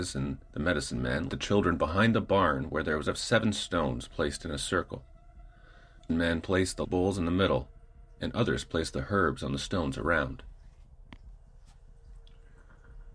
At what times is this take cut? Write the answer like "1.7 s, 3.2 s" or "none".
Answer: 1.3 s, 3.1 s, 6.1 s, 6.8 s